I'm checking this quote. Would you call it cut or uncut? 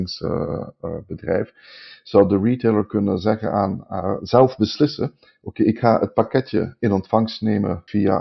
uncut